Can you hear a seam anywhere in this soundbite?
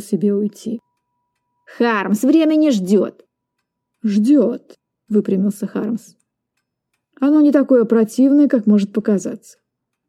no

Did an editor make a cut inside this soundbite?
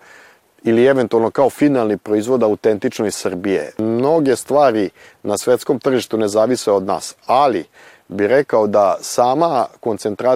no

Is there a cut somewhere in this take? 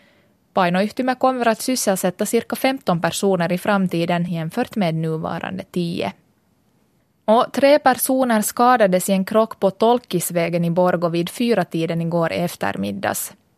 no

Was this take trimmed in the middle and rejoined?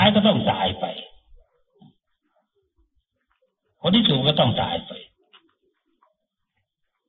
no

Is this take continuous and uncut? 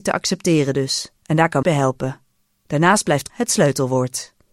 no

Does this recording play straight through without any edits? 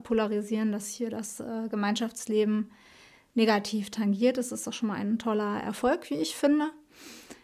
yes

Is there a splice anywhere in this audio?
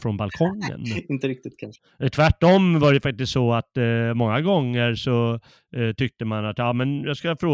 no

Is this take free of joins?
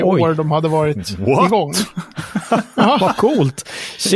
yes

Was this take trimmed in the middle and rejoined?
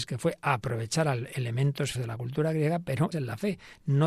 yes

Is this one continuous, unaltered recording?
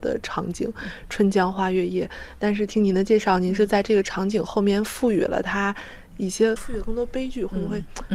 no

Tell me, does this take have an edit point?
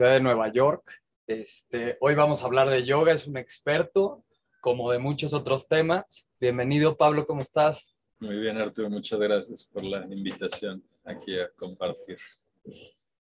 yes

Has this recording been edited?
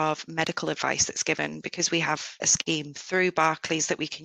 yes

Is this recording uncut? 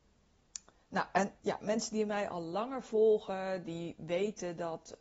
no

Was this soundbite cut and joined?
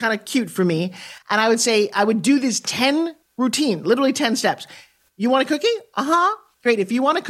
no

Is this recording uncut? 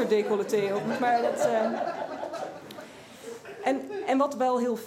yes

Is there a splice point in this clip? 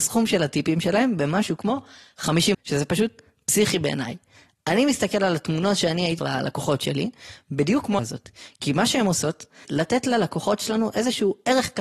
yes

